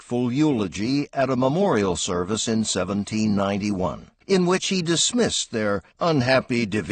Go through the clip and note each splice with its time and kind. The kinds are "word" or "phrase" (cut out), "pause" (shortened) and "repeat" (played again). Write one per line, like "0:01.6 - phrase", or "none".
0:04.2 - pause
0:05.9 - pause